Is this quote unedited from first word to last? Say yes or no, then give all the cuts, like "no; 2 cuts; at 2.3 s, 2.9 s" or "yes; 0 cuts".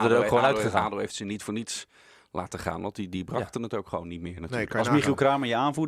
yes; 0 cuts